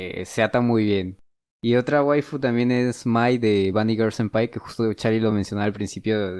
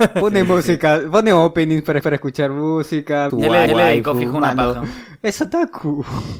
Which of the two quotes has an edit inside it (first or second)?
second